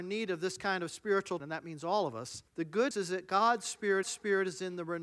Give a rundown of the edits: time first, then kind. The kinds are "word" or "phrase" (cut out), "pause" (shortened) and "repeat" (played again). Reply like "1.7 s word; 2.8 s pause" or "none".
1.4 s word; 2.5 s pause; 2.9 s word; 4.0 s repeat